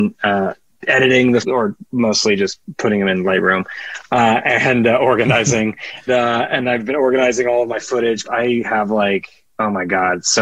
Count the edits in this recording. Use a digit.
3